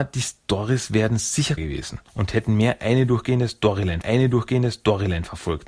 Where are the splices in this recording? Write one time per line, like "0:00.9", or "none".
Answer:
0:01.6
0:02.1
0:04.0